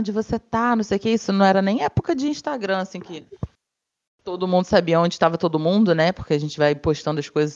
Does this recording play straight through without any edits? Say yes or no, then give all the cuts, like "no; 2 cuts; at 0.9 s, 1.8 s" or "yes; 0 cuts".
yes; 0 cuts